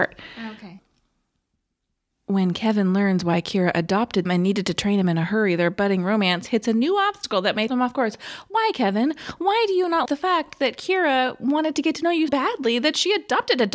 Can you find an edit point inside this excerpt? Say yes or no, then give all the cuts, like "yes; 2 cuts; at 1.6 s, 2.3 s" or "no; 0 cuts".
yes; 4 cuts; at 4.3 s, 7.7 s, 10.1 s, 12.3 s